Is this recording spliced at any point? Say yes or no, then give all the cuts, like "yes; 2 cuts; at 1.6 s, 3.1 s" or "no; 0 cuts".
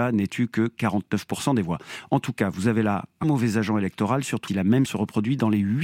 yes; 3 cuts; at 3.2 s, 4.5 s, 4.9 s